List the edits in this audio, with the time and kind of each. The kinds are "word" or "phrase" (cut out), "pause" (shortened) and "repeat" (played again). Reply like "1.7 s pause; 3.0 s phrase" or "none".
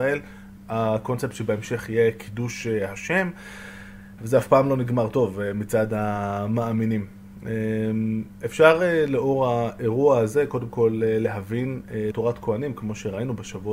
4.2 s word; 12.1 s word